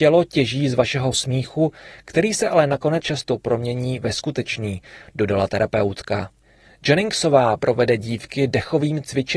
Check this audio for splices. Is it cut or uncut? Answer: cut